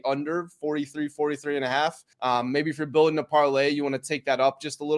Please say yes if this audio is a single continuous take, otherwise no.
no